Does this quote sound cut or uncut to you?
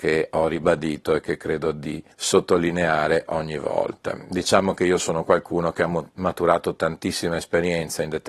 cut